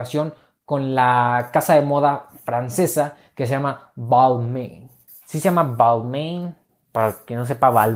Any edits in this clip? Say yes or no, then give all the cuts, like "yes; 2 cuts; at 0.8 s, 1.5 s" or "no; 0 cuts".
yes; 2 cuts; at 5.1 s, 6.7 s